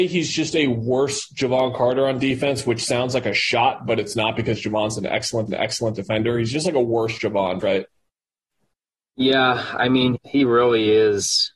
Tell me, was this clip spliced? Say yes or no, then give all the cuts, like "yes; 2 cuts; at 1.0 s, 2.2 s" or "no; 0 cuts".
yes; 3 cuts; at 5.5 s, 7.6 s, 10.2 s